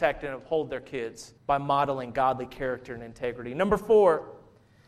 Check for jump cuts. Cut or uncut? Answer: cut